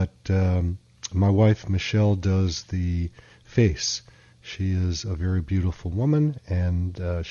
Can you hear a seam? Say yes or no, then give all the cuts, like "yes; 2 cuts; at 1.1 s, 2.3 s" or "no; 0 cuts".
no; 0 cuts